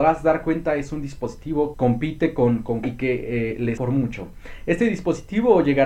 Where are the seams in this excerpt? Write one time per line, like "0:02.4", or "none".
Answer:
0:01.7
0:02.8
0:03.8